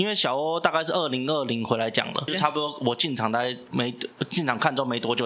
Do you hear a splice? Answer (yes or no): yes